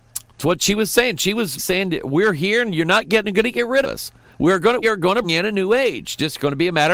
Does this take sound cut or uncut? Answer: cut